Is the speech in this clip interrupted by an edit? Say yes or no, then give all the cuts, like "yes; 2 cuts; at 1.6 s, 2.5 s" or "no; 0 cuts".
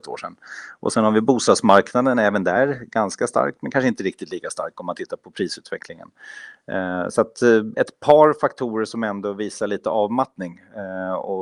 no; 0 cuts